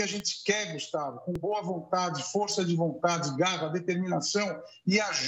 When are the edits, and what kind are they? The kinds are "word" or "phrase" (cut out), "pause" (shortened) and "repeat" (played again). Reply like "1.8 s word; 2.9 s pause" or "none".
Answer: none